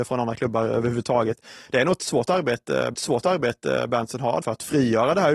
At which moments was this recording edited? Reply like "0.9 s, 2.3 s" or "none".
2.9 s, 4.4 s